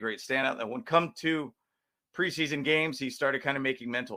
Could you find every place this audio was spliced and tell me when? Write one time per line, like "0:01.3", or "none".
none